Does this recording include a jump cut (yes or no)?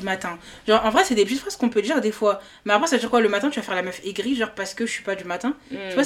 no